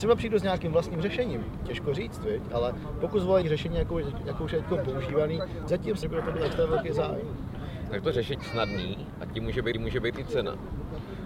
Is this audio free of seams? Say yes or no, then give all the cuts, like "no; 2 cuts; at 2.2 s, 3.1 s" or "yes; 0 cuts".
no; 5 cuts; at 3.4 s, 5.7 s, 6.0 s, 8.3 s, 9.7 s